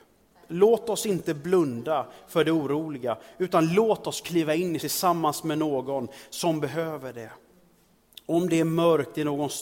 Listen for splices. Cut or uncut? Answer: cut